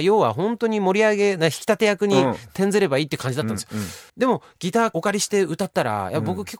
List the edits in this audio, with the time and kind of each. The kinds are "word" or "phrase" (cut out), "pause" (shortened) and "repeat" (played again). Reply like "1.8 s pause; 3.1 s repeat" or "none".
4.1 s pause